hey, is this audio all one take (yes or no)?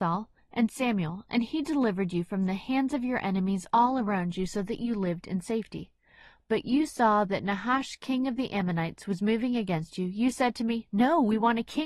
yes